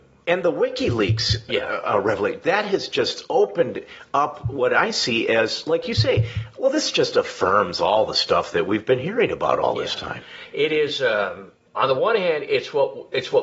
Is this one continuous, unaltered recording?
yes; 0 cuts

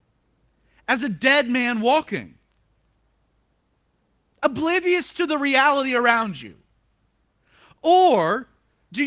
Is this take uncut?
yes; 0 cuts

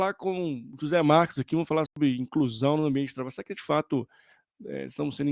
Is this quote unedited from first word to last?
no; 1 cut; at 1.9 s

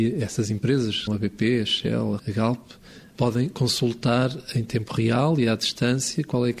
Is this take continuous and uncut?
no; 2 cuts; at 1.1 s, 2.2 s

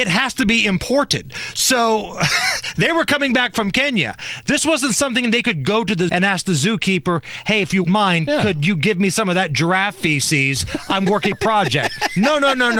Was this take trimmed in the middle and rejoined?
yes; 3 cuts; at 6.1 s, 7.8 s, 11.3 s

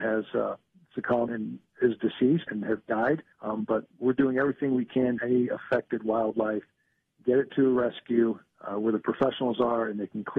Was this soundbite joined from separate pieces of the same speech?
yes; 4 cuts; at 1.3 s, 2.5 s, 3.3 s, 5.2 s

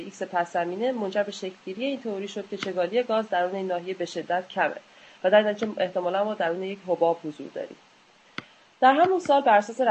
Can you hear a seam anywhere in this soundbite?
no; 0 cuts

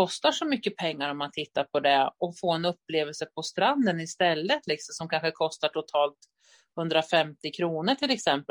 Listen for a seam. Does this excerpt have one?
no; 0 cuts

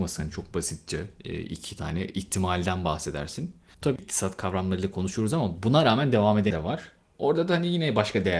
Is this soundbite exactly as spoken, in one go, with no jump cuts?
no; 2 cuts; at 4.0 s, 6.5 s

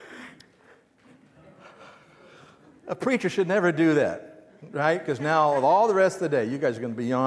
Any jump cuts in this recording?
no; 0 cuts

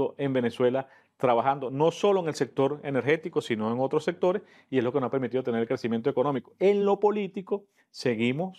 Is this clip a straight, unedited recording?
yes; 0 cuts

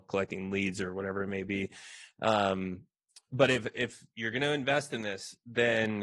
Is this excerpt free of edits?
yes; 0 cuts

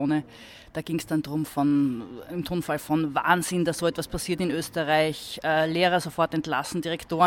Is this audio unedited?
yes; 0 cuts

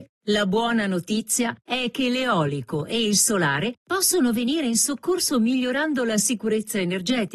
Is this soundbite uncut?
yes; 0 cuts

